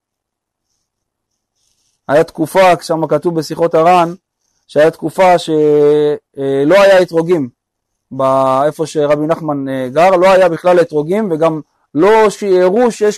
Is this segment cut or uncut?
uncut